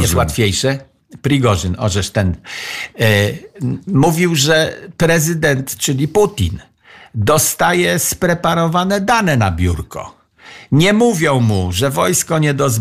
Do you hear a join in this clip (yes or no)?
no